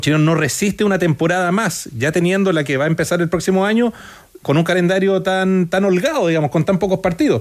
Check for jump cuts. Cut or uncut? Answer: uncut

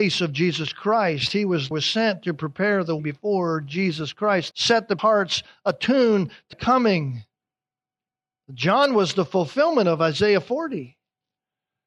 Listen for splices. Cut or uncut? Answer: cut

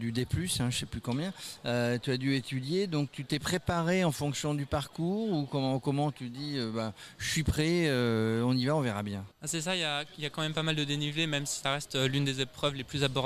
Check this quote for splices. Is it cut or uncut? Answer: cut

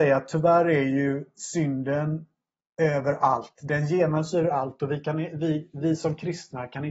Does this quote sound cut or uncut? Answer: uncut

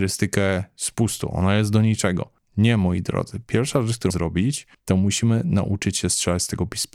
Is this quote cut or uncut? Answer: cut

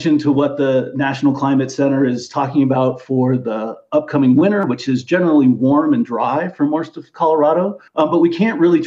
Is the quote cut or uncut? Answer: cut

